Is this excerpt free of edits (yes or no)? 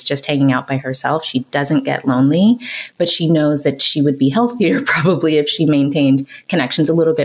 yes